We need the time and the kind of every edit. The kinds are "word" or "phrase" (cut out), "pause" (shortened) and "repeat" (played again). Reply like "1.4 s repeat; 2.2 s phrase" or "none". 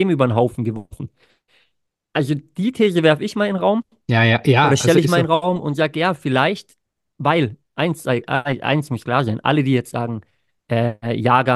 none